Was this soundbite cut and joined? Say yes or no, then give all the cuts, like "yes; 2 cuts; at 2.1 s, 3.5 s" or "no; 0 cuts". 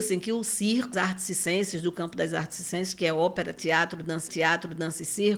yes; 2 cuts; at 0.9 s, 4.3 s